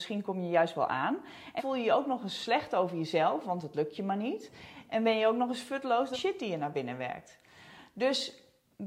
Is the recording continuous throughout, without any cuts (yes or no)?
no